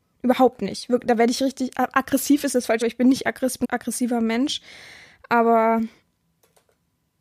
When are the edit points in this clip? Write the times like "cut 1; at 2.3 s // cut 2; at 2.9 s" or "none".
cut 1; at 2.8 s // cut 2; at 3.6 s